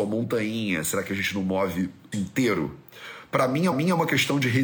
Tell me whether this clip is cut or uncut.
cut